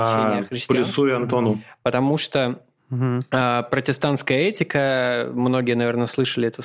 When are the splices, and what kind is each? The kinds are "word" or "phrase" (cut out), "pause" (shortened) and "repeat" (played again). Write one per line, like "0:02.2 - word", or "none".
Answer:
none